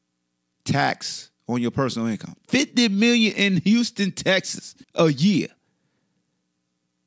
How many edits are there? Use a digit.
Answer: 3